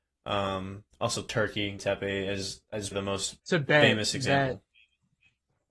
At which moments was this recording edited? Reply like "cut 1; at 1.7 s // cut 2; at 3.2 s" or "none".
cut 1; at 0.9 s // cut 2; at 1.8 s // cut 3; at 2.9 s // cut 4; at 3.4 s